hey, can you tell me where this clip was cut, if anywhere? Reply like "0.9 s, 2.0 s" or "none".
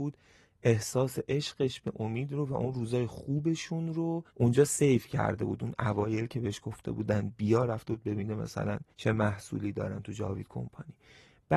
4.3 s, 8.9 s